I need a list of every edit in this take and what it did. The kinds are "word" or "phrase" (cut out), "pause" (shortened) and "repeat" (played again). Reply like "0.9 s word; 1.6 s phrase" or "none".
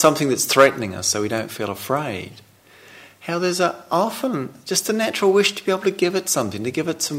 none